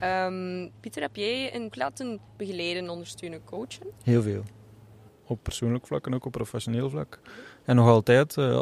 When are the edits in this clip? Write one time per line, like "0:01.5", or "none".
0:01.7
0:02.3